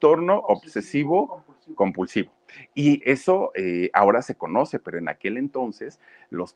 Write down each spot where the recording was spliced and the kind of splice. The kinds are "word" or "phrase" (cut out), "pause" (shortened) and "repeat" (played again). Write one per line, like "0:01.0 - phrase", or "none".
0:03.0 - word